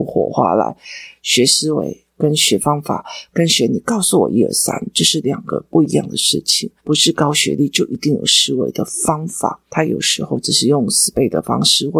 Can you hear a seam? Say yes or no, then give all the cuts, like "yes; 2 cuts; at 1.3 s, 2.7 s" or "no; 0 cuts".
yes; 1 cut; at 6.8 s